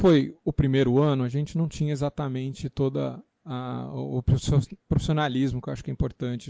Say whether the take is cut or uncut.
uncut